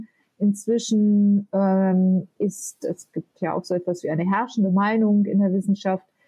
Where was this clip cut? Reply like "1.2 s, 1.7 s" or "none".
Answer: none